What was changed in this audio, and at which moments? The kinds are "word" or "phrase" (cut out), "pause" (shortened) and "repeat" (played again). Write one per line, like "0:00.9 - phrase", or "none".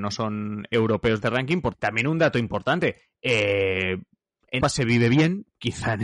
0:01.2 - word
0:01.7 - word
0:04.6 - word